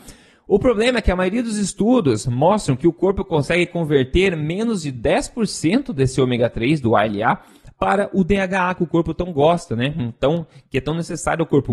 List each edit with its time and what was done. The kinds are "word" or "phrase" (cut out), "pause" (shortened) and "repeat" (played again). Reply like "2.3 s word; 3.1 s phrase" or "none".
none